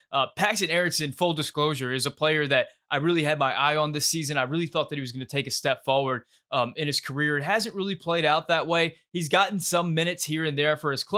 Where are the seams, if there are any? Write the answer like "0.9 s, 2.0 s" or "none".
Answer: none